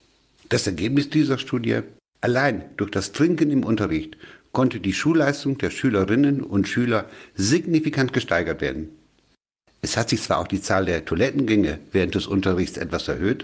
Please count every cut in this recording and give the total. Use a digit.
0